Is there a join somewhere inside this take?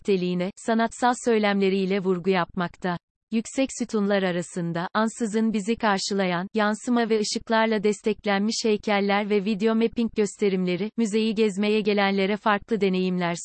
yes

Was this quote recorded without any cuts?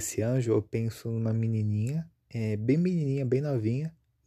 no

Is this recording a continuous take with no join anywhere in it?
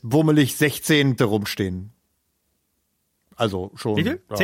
no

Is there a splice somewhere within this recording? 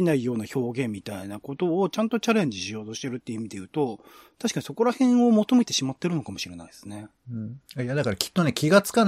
no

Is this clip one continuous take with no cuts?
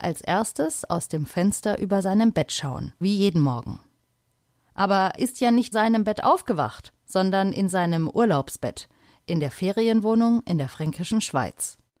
no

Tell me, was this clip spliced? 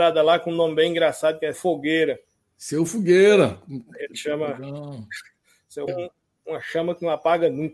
yes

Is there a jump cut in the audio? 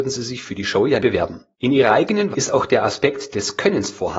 yes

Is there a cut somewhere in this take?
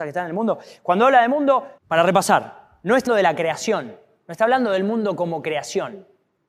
yes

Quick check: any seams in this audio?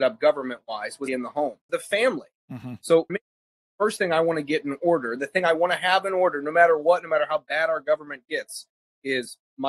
yes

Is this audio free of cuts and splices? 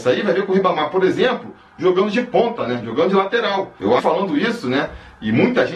no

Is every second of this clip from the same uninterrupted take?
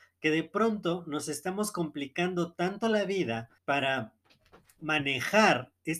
no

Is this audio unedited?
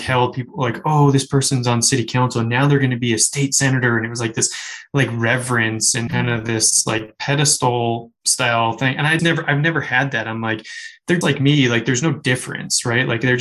no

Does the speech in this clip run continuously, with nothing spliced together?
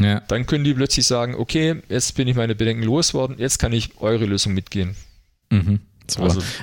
yes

